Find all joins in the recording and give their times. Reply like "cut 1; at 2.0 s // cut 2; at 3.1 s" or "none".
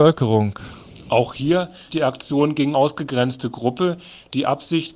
cut 1; at 1.9 s // cut 2; at 2.7 s